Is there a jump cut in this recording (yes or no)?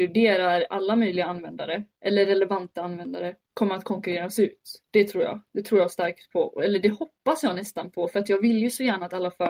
yes